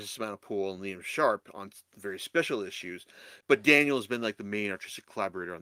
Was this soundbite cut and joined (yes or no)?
no